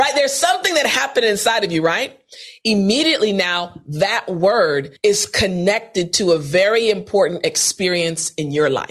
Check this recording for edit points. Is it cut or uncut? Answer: cut